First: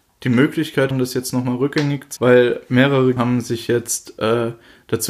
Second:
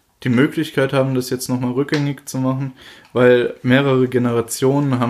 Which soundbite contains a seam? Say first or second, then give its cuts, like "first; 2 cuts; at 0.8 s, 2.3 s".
first; 3 cuts; at 0.9 s, 2.2 s, 3.2 s